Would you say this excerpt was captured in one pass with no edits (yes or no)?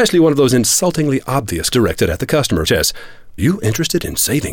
no